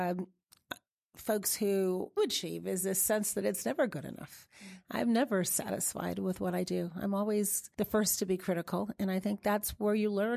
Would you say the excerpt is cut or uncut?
cut